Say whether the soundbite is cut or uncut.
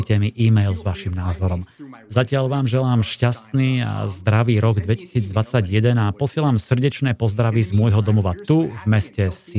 uncut